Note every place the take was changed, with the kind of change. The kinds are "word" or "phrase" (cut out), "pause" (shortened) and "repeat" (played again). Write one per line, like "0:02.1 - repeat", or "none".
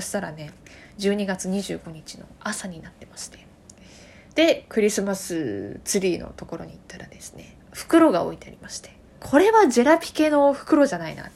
0:07.6 - pause
0:09.1 - pause

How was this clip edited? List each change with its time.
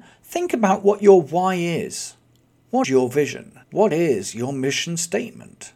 0:02.8 - word
0:03.6 - pause

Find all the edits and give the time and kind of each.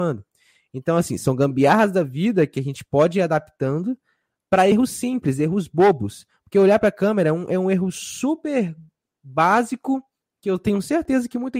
0:04.7 - phrase

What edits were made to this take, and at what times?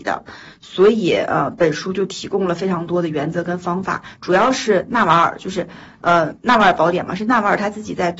none

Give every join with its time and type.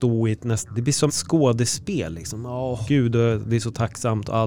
0:01.1 - word
0:02.8 - word

